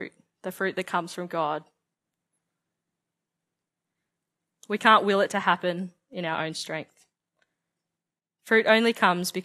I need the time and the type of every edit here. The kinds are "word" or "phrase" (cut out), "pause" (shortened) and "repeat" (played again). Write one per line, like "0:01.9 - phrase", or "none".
none